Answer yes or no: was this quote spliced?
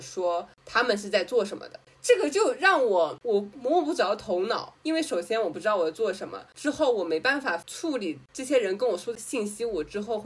no